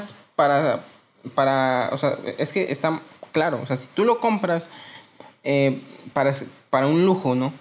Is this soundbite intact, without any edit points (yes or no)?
yes